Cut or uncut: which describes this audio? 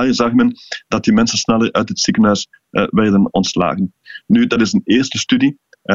uncut